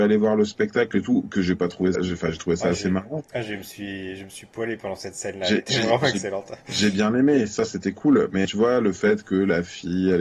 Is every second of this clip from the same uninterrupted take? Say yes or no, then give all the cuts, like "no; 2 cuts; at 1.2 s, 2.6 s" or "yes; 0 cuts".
no; 2 cuts; at 1.9 s, 8.4 s